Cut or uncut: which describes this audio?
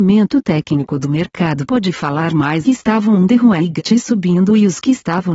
cut